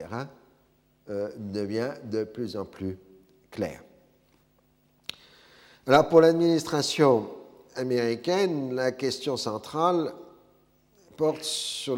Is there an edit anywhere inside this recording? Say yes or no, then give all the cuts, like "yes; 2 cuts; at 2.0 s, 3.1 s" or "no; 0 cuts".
no; 0 cuts